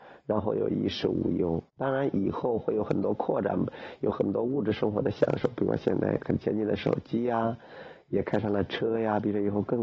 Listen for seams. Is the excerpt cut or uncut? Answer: cut